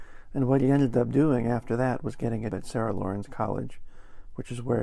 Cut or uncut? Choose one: cut